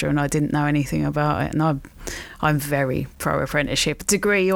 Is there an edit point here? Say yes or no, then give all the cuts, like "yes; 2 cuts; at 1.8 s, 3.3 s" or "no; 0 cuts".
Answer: no; 0 cuts